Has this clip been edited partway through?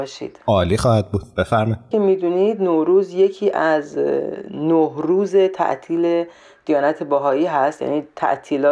yes; 1 cut; at 1.9 s

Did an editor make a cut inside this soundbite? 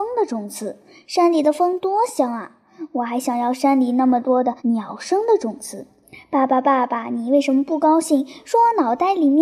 yes; 1 cut; at 4.6 s

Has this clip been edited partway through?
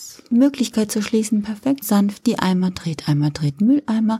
yes; 1 cut; at 1.8 s

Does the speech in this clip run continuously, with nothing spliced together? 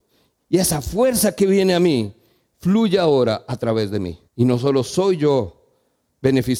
no; 1 cut; at 4.3 s

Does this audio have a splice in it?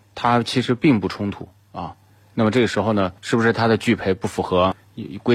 yes; 1 cut; at 3.2 s

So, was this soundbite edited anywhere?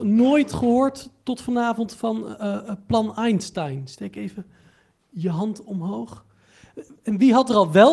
no; 0 cuts

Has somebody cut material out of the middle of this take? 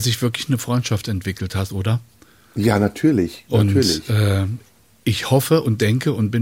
yes; 1 cut; at 1.7 s

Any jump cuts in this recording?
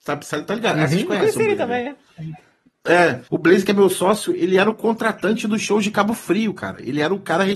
yes; 1 cut; at 3.3 s

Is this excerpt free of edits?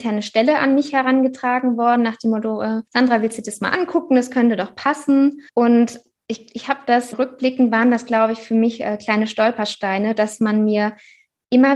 no; 3 cuts; at 2.9 s, 5.5 s, 7.1 s

